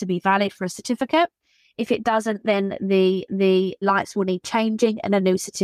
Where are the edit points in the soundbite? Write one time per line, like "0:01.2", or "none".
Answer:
0:03.3